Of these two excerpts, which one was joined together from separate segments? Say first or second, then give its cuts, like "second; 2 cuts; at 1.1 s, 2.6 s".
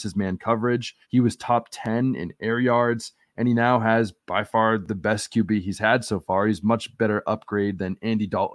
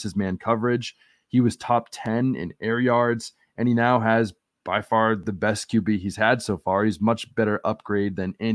first; 2 cuts; at 1.0 s, 4.2 s